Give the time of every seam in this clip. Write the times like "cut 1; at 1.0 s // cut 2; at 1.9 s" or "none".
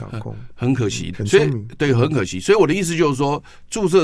cut 1; at 1.1 s

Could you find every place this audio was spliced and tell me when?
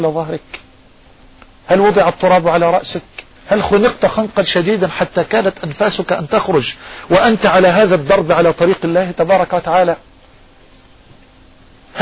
cut 1; at 3.4 s

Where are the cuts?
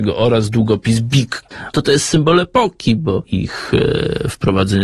none

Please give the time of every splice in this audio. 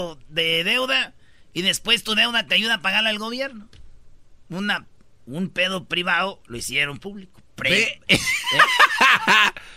none

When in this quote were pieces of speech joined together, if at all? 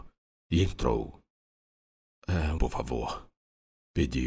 cut 1; at 2.6 s

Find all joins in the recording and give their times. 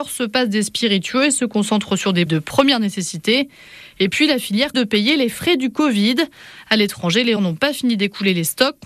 cut 1; at 2.3 s // cut 2; at 4.7 s // cut 3; at 7.4 s

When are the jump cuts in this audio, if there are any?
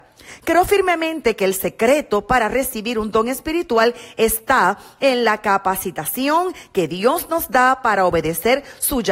none

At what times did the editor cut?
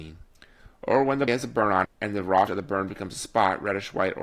cut 1; at 1.3 s // cut 2; at 1.8 s // cut 3; at 2.5 s

